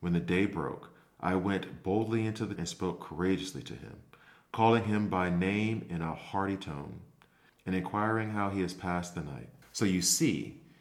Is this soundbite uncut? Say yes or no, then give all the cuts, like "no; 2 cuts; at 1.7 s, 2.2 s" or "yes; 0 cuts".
no; 1 cut; at 2.6 s